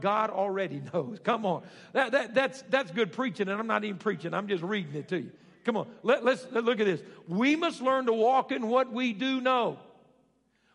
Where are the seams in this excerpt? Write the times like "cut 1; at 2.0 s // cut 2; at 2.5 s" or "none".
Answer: none